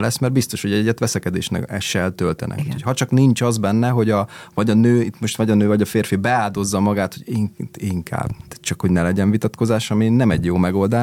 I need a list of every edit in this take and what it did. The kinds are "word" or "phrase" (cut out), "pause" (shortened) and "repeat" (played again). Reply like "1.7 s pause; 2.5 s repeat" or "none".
none